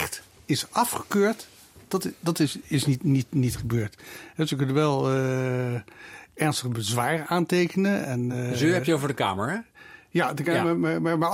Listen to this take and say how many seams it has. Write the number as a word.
zero